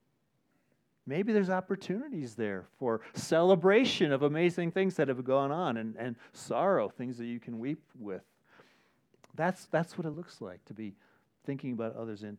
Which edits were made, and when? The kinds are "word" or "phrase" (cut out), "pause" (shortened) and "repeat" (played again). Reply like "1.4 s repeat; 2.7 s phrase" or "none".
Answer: none